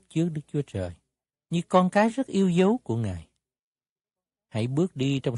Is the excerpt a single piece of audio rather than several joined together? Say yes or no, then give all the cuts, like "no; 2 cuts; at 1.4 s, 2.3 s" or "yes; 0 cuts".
yes; 0 cuts